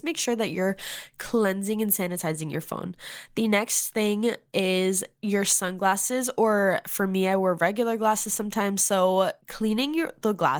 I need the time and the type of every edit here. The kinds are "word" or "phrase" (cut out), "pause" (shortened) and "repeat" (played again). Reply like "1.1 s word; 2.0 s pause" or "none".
9.4 s pause